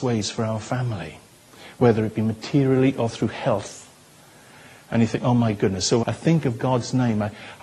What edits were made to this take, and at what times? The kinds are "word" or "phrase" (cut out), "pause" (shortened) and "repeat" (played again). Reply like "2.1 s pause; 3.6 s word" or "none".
6.0 s word